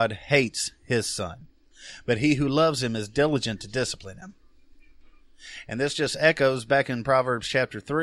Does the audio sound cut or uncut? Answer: uncut